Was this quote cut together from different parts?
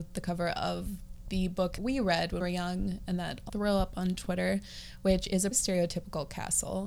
yes; 4 cuts; at 1.8 s, 2.4 s, 3.5 s, 5.5 s

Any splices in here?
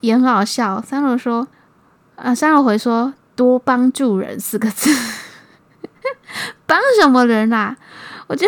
yes; 1 cut; at 1.5 s

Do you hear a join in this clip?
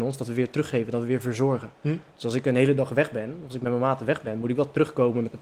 no; 0 cuts

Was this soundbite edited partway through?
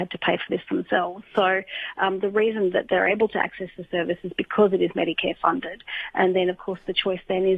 no; 0 cuts

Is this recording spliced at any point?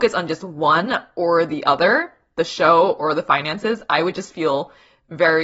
no; 0 cuts

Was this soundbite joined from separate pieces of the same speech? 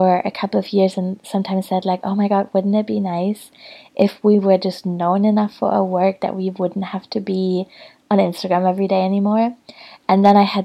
no; 0 cuts

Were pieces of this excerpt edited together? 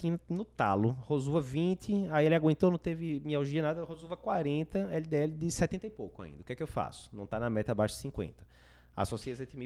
no; 0 cuts

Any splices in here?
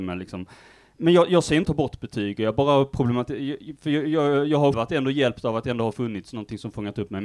yes; 2 cuts; at 1.6 s, 4.7 s

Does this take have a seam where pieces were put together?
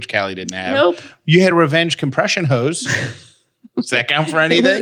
no; 0 cuts

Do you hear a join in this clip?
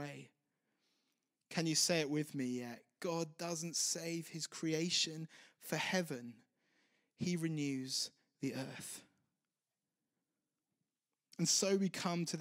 no; 0 cuts

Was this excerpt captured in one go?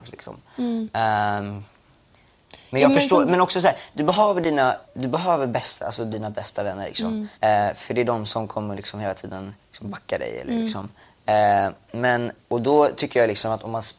no; 5 cuts; at 4.8 s, 6.1 s, 7.3 s, 9.6 s, 12.4 s

